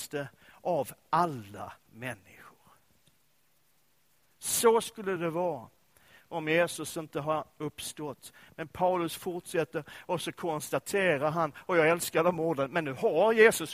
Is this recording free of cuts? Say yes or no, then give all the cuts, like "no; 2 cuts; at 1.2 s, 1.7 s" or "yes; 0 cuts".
yes; 0 cuts